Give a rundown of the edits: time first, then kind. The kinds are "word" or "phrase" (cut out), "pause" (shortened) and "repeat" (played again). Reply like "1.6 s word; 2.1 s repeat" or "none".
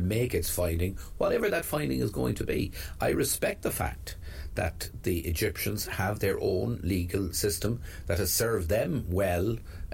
none